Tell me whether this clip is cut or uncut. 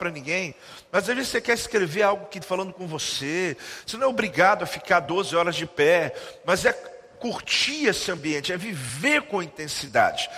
cut